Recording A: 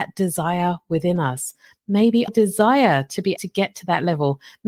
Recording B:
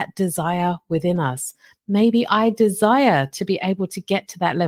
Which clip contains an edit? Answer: A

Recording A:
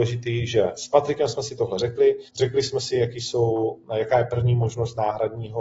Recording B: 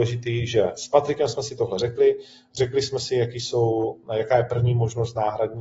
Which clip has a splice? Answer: A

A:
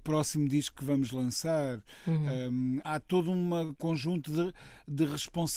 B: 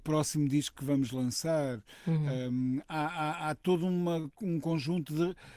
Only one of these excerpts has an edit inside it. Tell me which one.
A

